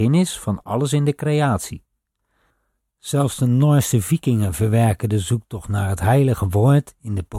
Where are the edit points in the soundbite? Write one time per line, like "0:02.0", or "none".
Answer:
none